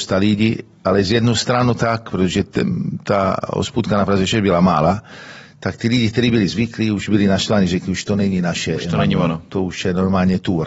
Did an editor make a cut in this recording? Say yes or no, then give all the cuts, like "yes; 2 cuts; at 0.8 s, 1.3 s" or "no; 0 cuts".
no; 0 cuts